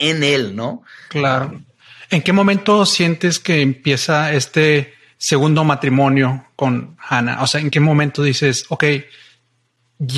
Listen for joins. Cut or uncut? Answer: uncut